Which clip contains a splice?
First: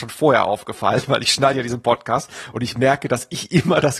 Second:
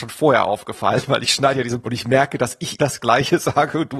second; 2 cuts; at 1.8 s, 2.8 s

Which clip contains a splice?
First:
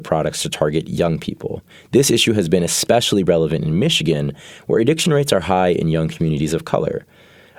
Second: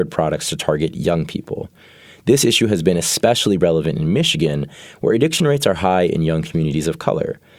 first; 1 cut; at 1.7 s

